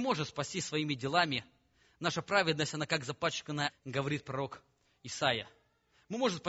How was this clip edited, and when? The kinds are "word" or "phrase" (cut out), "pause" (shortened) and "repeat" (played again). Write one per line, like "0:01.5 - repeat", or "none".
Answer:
0:03.7 - word